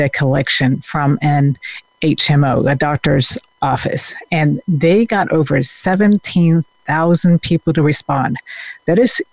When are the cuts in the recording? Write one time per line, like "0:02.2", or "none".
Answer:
none

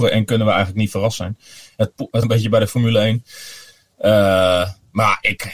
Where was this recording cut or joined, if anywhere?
0:02.2

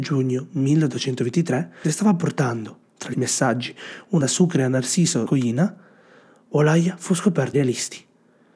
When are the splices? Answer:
0:01.8
0:03.1
0:04.2
0:05.2
0:07.5

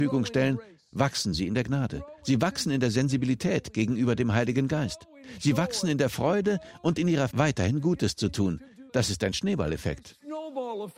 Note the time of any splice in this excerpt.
0:07.3
0:08.9

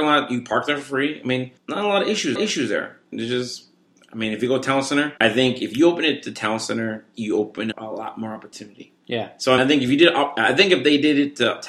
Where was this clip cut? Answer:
0:01.6
0:02.4
0:03.1
0:03.9
0:05.2
0:07.7
0:09.6

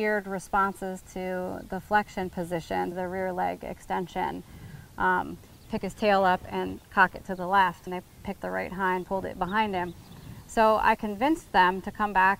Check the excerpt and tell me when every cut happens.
0:02.9
0:05.7
0:07.9
0:08.4
0:09.0

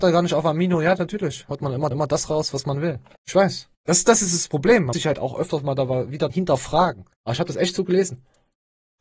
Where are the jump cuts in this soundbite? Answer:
0:01.9
0:03.1
0:03.7
0:04.9
0:06.3
0:07.1

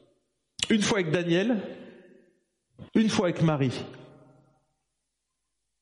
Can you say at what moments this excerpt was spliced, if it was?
0:02.9

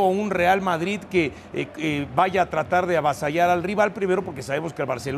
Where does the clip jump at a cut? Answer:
none

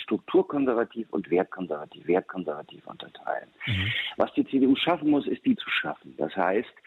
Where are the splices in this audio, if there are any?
0:02.0
0:05.6

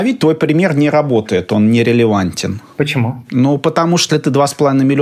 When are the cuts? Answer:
0:04.1

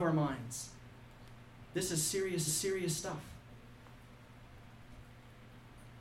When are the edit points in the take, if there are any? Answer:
0:02.5

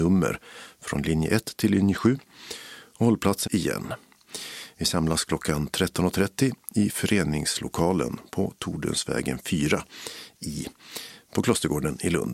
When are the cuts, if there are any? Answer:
0:03.5

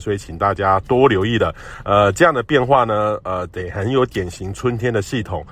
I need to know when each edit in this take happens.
none

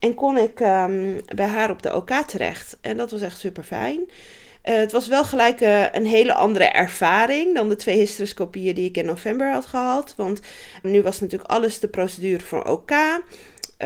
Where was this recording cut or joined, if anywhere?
0:10.8

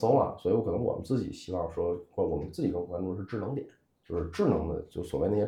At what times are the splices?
0:03.9

